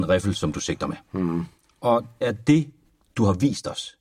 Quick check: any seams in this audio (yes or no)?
yes